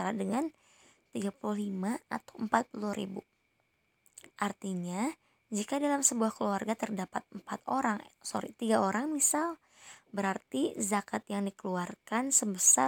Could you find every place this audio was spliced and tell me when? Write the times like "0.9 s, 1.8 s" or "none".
4.3 s, 8.1 s